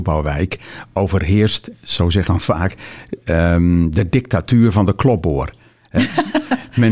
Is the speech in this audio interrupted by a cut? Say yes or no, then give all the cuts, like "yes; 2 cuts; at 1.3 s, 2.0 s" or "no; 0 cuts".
yes; 1 cut; at 2.2 s